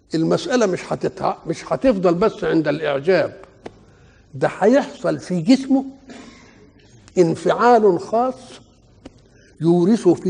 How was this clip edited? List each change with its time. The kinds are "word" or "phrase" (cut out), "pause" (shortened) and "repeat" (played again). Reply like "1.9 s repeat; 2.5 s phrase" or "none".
none